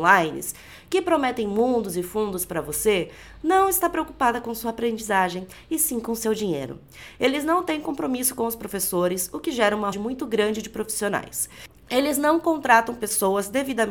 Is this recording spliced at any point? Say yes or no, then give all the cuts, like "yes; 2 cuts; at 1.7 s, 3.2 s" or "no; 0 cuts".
yes; 1 cut; at 9.9 s